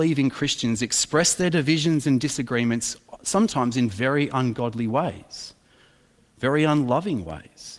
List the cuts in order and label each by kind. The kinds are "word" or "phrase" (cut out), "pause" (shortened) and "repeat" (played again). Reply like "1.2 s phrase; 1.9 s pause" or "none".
none